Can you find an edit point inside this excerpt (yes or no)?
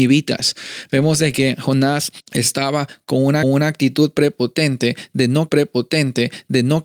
yes